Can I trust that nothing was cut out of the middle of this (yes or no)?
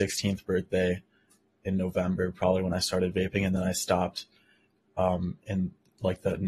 yes